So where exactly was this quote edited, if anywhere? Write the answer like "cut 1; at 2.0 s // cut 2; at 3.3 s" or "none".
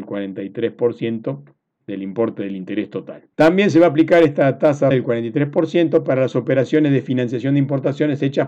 cut 1; at 1.8 s // cut 2; at 3.3 s // cut 3; at 4.9 s